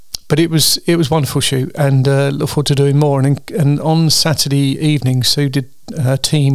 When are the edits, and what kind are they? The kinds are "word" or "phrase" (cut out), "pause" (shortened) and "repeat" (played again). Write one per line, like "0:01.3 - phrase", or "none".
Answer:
none